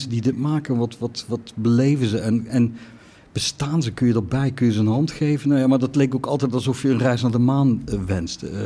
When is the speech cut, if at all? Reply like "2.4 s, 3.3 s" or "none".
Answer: none